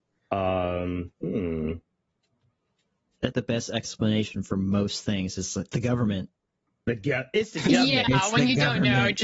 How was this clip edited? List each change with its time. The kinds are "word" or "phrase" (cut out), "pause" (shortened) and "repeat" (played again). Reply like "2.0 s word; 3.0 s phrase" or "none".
3.3 s word